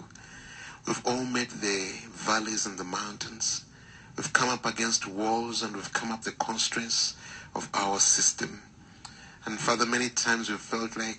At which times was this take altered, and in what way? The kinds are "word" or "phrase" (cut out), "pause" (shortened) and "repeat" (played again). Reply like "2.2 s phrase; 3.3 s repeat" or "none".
6.2 s word